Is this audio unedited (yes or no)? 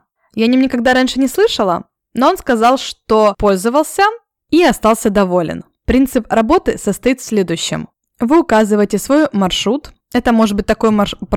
yes